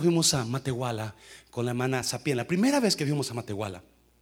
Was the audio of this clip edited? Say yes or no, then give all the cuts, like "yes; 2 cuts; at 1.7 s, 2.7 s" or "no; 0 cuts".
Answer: no; 0 cuts